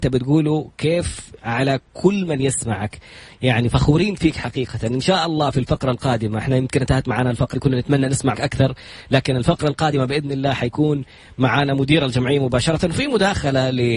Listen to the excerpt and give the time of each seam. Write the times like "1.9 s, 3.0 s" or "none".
7.5 s, 8.3 s